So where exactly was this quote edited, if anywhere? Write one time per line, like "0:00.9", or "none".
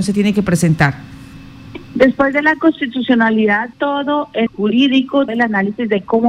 0:03.7
0:04.5
0:05.3